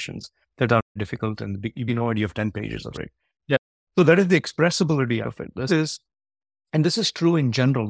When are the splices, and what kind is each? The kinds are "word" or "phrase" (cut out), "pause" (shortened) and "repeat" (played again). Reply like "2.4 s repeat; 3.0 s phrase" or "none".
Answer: 1.0 s word; 1.9 s word; 2.9 s word; 5.2 s word; 5.7 s word